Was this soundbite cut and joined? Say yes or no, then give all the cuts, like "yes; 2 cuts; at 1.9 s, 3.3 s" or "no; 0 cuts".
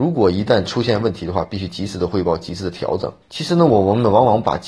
yes; 1 cut; at 3.2 s